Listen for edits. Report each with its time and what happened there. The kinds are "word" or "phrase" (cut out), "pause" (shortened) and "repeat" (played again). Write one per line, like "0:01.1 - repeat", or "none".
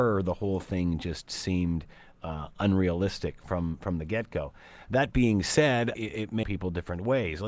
0:05.9 - word
0:06.4 - phrase

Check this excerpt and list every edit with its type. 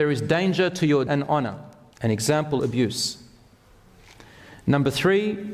0:01.1 - word
0:01.9 - pause
0:02.6 - phrase

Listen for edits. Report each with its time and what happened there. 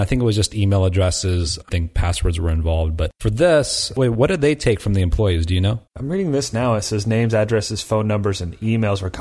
0:01.7 - phrase
0:05.9 - pause

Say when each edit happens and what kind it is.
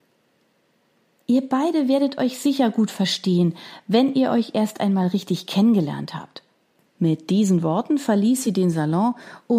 none

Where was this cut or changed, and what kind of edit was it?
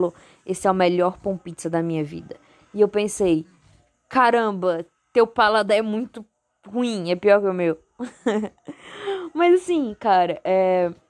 none

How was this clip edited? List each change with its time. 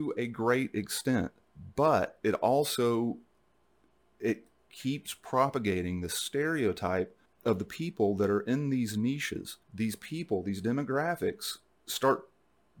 0:07.3 - pause
0:09.6 - pause

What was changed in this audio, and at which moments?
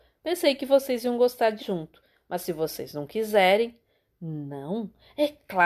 0:01.6 - word

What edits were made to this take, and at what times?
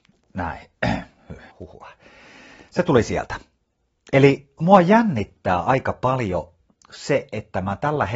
0:01.5 - pause

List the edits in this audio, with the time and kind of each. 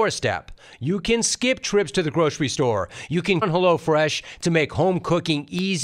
0:03.4 - word

